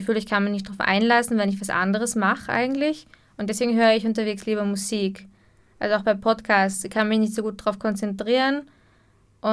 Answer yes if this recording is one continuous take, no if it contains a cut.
yes